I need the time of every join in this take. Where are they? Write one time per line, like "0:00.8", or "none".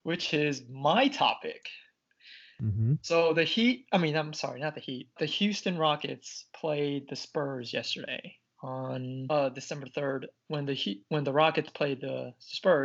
0:05.2